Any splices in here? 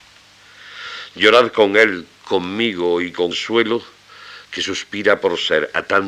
yes; 1 cut; at 3.3 s

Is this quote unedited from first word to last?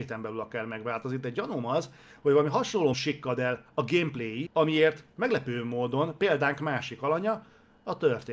no; 2 cuts; at 2.9 s, 4.5 s

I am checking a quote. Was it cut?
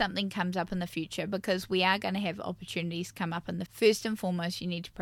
yes; 1 cut; at 3.7 s

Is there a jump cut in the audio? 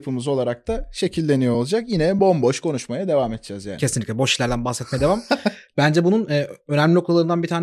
no; 0 cuts

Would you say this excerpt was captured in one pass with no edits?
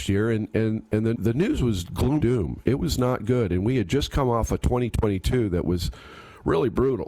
no; 2 cuts; at 1.2 s, 2.2 s

